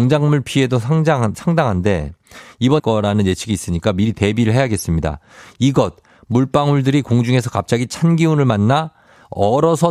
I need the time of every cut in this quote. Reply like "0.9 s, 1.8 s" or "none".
2.8 s